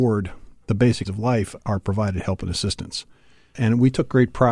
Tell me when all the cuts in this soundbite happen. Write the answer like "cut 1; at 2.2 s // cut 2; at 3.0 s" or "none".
cut 1; at 1.0 s // cut 2; at 1.6 s